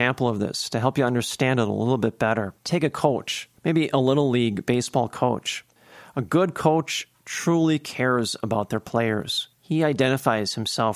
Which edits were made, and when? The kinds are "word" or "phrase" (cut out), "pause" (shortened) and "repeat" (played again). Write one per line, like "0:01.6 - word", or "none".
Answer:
0:02.6 - pause
0:03.6 - pause
0:09.5 - pause